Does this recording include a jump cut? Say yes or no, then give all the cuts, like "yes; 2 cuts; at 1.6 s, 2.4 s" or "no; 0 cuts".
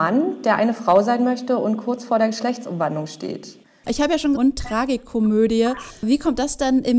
yes; 1 cut; at 4.3 s